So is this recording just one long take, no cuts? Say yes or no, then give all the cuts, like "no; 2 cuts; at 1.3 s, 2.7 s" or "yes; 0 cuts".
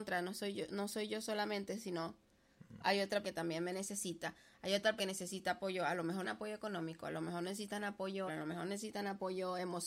no; 4 cuts; at 3.2 s, 5.0 s, 6.2 s, 8.3 s